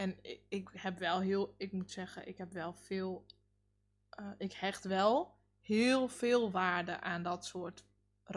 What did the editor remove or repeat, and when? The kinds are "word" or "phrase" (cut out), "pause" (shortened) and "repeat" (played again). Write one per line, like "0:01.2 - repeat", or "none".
none